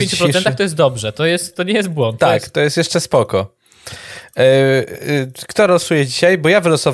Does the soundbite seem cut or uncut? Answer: uncut